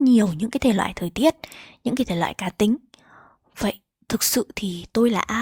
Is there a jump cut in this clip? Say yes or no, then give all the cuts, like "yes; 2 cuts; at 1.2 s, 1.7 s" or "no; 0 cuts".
no; 0 cuts